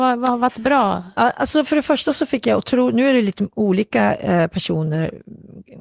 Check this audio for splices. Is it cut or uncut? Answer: uncut